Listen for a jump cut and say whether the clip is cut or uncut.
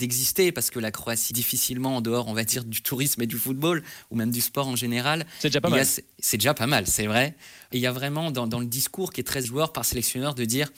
cut